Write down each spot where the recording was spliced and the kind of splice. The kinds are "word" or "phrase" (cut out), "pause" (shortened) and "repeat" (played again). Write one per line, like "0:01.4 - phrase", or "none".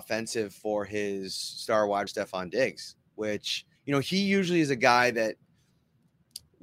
0:02.1 - word
0:03.8 - word